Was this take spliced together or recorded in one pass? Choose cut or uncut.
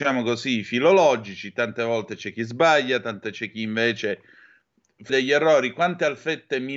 cut